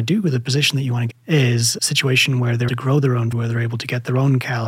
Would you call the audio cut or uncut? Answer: cut